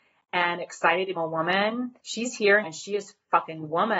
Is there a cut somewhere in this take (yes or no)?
yes